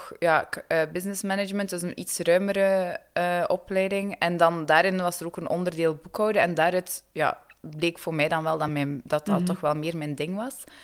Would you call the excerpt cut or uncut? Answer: uncut